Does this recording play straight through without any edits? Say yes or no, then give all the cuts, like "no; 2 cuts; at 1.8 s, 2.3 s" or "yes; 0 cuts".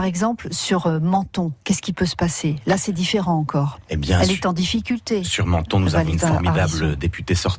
no; 1 cut; at 1.6 s